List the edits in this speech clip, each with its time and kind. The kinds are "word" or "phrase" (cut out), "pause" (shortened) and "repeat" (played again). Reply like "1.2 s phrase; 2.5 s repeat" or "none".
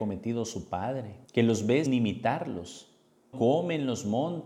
1.2 s pause; 1.8 s word; 3.3 s phrase